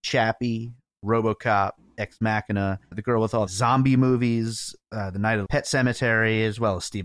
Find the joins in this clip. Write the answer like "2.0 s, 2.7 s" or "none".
2.9 s, 3.5 s, 4.8 s, 5.5 s